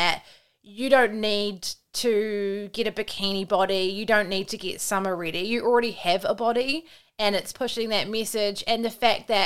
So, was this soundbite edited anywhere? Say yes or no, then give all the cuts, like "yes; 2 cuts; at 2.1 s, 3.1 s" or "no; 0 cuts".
yes; 1 cut; at 7.5 s